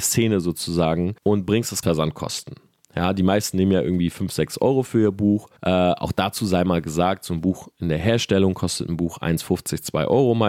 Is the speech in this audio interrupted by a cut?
yes; 3 cuts; at 1.2 s, 1.8 s, 5.6 s

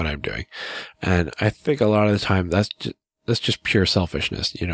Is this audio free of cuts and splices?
yes; 0 cuts

